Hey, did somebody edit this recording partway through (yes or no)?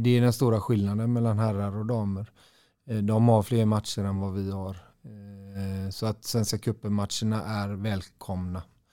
no